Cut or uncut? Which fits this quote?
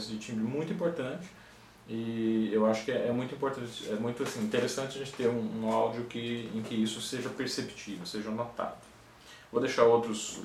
uncut